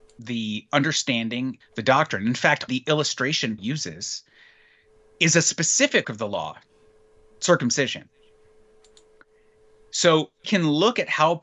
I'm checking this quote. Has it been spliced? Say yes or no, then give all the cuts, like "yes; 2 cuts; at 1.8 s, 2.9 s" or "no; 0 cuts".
yes; 5 cuts; at 1.6 s, 2.7 s, 3.6 s, 6.0 s, 10.4 s